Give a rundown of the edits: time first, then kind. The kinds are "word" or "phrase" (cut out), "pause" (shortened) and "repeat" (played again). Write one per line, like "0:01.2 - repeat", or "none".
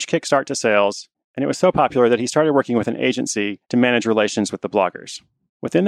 none